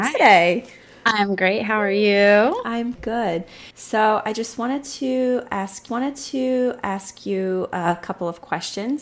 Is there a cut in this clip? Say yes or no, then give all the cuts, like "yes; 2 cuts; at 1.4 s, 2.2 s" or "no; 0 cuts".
yes; 3 cuts; at 3.0 s, 3.7 s, 5.9 s